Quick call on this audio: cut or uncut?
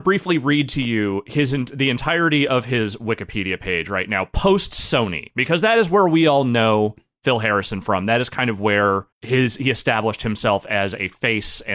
cut